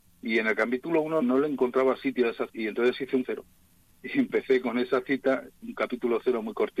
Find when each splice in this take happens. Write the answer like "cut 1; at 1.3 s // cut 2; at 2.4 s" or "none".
cut 1; at 1.2 s // cut 2; at 2.5 s // cut 3; at 3.2 s